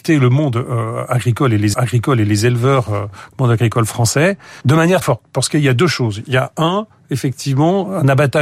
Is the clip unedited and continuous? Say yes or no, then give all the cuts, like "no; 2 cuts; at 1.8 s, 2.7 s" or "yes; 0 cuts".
no; 3 cuts; at 1.7 s, 4.6 s, 5.0 s